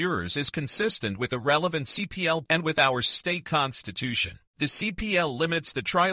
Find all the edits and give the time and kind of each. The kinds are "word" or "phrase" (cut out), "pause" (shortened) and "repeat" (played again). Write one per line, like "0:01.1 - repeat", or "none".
0:02.4 - word
0:04.5 - pause